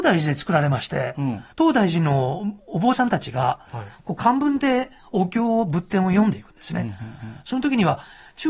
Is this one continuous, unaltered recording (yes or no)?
no